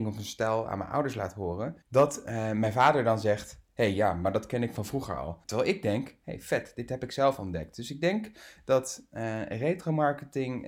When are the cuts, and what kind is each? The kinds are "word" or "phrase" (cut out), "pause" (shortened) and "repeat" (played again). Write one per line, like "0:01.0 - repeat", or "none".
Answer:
0:01.8 - pause
0:05.4 - pause

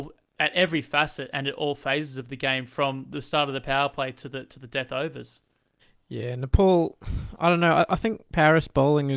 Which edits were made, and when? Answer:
0:05.8 - pause

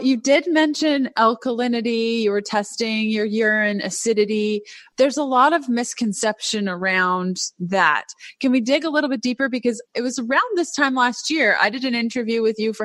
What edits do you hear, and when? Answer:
0:09.8 - phrase

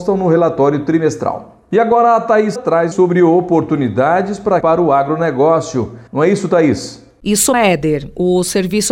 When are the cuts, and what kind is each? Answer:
0:02.6 - word
0:02.9 - word
0:04.6 - phrase
0:06.1 - pause
0:07.5 - word

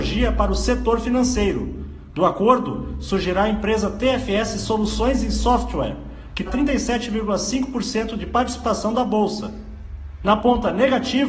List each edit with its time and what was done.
0:06.5 - word

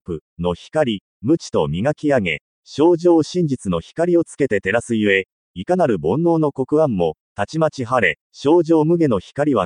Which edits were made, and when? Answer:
0:01.1 - phrase
0:08.2 - pause

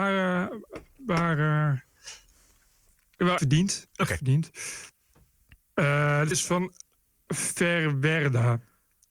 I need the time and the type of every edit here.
0:03.4 - word
0:06.3 - word
0:07.3 - word

